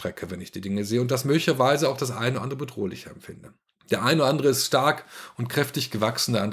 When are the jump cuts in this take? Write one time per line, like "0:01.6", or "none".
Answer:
none

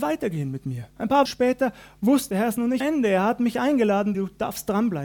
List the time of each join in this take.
0:00.9
0:01.3
0:02.3
0:02.8
0:04.1

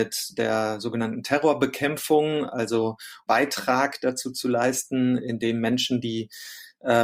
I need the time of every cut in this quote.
0:03.3

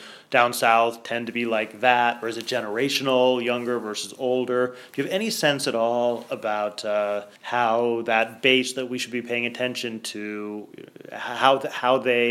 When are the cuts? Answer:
0:07.3

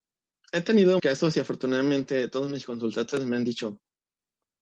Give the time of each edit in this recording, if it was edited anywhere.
0:01.0

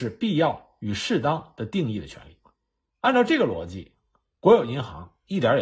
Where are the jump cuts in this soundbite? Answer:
none

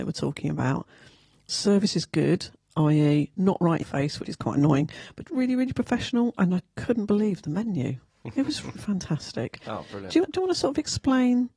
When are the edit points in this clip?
0:03.8
0:04.3
0:05.2
0:06.5
0:08.7
0:10.2

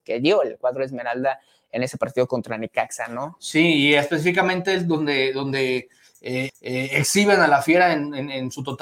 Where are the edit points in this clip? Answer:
0:06.5

